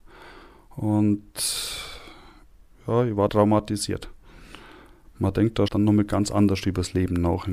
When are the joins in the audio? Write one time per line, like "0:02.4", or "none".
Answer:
0:03.3
0:05.7